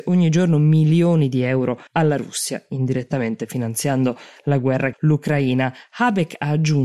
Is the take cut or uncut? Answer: cut